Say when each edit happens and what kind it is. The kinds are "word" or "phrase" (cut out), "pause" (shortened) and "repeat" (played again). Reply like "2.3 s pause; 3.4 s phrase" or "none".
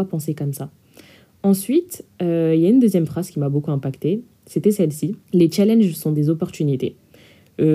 5.2 s pause